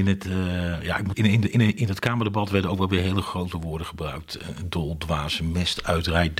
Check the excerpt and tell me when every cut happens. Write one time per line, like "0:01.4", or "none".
0:01.1